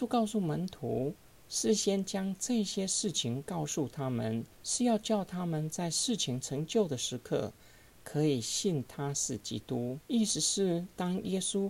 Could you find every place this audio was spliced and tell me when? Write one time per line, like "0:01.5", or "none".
0:04.5
0:10.0